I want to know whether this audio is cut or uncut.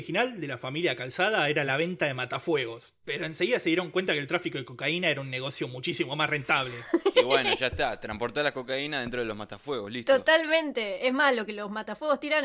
uncut